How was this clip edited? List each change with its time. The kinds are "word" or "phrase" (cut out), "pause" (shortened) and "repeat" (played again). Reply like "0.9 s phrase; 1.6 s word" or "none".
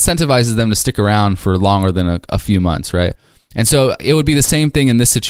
none